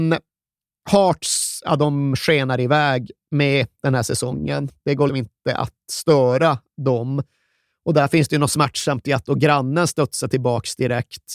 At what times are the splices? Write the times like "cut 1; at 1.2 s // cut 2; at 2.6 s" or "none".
cut 1; at 5.1 s